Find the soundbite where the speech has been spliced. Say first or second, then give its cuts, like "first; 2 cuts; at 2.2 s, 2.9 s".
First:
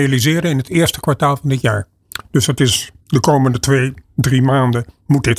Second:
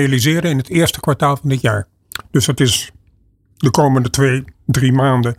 first; 1 cut; at 3.0 s